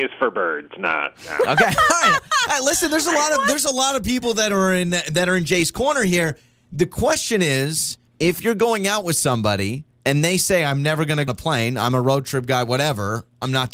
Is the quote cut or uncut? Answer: cut